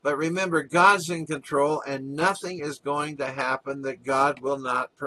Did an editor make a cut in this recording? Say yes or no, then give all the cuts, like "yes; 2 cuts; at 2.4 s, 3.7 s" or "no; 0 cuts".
no; 0 cuts